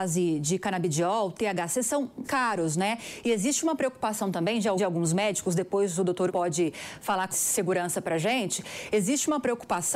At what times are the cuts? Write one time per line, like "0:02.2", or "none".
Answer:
0:02.2
0:04.8
0:06.3
0:07.3